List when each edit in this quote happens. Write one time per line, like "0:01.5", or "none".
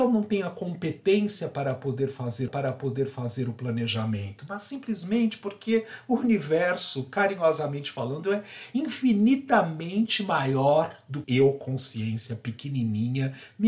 0:02.5
0:11.2